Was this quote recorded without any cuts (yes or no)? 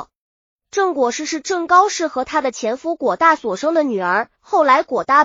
no